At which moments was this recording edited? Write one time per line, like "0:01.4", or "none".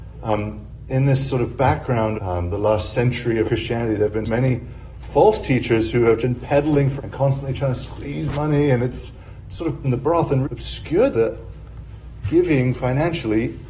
0:02.1
0:03.4
0:04.3
0:06.2
0:07.0
0:09.8
0:10.4
0:11.1